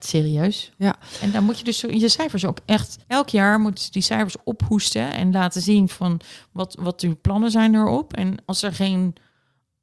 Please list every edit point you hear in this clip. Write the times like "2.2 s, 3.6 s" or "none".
3.0 s